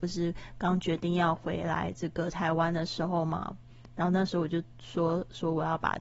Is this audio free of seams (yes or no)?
yes